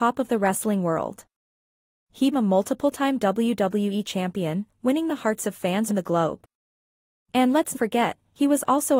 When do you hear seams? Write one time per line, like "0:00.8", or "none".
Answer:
0:02.3
0:05.9
0:07.7